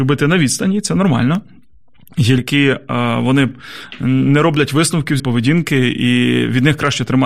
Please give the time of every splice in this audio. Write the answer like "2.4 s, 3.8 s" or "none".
2.4 s, 5.2 s

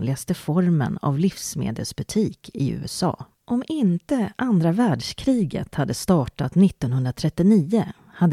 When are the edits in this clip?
3.3 s

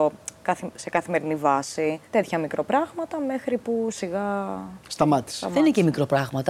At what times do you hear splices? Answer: 2.1 s, 3.9 s, 4.8 s

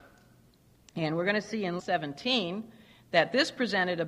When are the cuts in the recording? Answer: 1.8 s

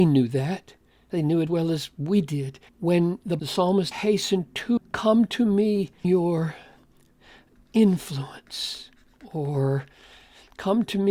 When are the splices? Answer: 1.5 s, 2.7 s, 3.4 s, 3.9 s, 4.8 s, 6.0 s

